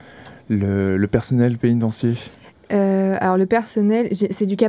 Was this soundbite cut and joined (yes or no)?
no